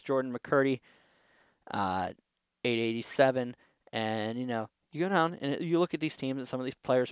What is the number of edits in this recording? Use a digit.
0